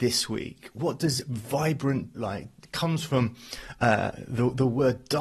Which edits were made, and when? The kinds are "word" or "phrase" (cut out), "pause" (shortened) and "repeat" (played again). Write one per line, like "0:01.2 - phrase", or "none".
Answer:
0:02.1 - phrase